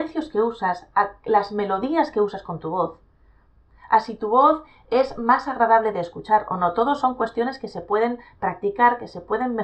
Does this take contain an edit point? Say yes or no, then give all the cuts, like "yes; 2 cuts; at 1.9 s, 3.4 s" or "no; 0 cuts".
no; 0 cuts